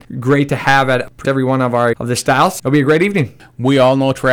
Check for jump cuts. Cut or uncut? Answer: cut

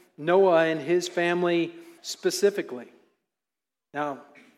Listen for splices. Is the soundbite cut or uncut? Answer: cut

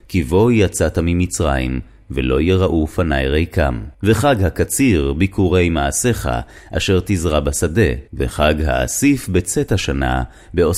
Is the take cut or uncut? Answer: cut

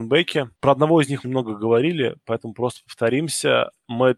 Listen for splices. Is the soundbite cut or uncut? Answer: cut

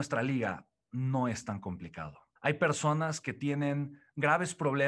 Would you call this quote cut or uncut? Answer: cut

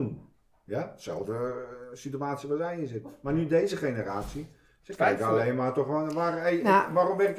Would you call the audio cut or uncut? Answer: uncut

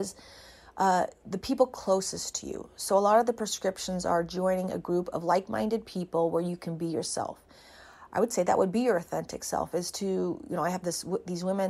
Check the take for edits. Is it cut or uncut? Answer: uncut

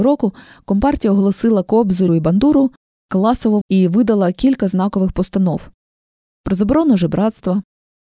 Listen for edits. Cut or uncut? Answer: cut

